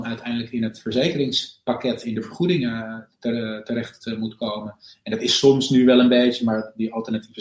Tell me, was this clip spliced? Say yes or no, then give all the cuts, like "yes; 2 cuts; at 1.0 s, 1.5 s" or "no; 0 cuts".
no; 0 cuts